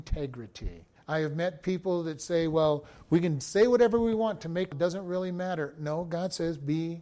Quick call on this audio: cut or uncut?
cut